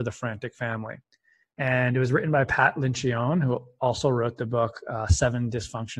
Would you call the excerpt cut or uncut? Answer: uncut